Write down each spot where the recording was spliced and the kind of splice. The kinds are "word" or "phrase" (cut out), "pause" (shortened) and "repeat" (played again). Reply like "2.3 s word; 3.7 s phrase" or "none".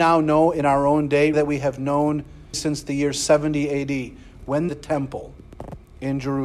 1.3 s word; 2.5 s word; 4.7 s phrase